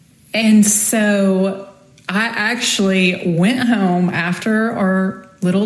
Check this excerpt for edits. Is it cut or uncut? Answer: uncut